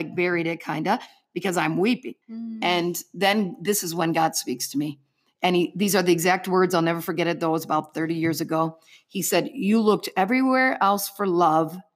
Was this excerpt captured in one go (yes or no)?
no